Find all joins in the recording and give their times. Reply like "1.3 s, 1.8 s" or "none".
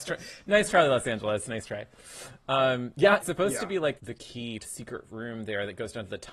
3.2 s, 4.0 s, 4.6 s